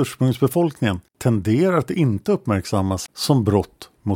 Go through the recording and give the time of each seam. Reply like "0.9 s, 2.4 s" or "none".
1.1 s, 3.1 s